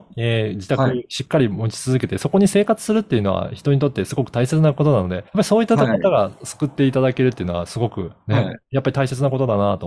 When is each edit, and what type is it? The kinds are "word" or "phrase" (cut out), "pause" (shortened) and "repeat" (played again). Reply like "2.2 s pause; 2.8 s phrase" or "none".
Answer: 5.3 s pause